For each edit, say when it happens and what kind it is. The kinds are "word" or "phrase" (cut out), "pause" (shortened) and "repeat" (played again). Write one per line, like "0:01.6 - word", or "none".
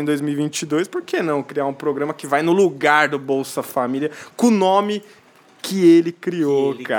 none

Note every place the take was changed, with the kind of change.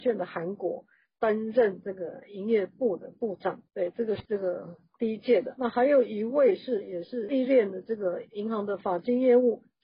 none

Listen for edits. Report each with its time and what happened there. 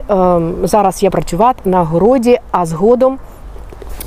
0:01.1 - word
0:01.6 - word

